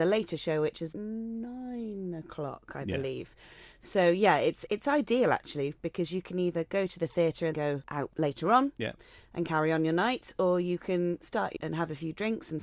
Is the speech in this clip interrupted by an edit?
yes; 4 cuts; at 0.9 s, 4.7 s, 7.5 s, 11.6 s

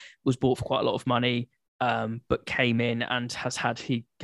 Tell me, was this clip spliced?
no; 0 cuts

